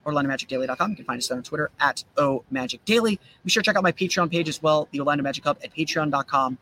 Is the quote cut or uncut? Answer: uncut